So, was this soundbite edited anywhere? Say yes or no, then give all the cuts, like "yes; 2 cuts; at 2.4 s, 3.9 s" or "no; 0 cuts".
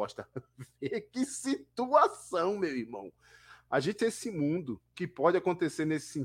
yes; 2 cuts; at 4.0 s, 4.9 s